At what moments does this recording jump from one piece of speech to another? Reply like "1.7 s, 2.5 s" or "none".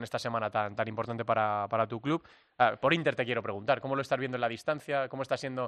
none